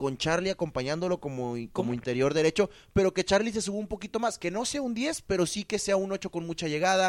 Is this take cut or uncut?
uncut